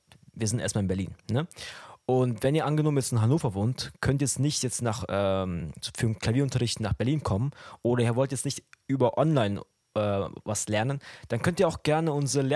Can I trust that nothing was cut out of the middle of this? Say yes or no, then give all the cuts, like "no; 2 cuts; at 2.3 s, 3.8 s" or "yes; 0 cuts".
yes; 0 cuts